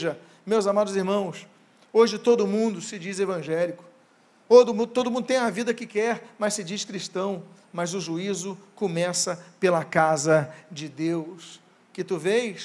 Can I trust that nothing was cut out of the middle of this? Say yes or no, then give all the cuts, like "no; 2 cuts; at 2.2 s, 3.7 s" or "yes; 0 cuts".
yes; 0 cuts